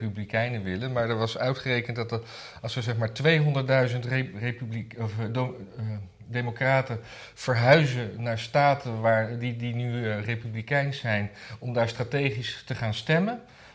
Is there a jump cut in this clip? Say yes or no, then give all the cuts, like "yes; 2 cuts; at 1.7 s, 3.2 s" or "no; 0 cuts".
no; 0 cuts